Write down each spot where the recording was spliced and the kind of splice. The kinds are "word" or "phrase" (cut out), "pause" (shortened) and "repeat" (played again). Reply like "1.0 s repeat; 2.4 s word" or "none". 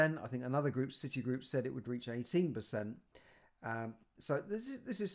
none